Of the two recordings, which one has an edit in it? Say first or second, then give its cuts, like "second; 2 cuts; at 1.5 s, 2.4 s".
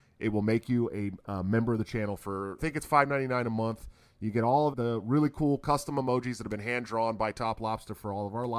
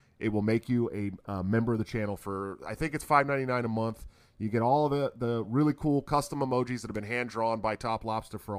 first; 2 cuts; at 2.6 s, 4.7 s